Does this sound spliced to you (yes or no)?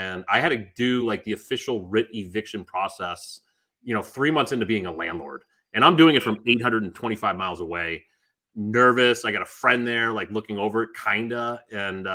no